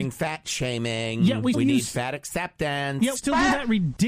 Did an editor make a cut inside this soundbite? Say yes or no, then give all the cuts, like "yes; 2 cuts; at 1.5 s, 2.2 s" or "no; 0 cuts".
yes; 2 cuts; at 1.5 s, 3.2 s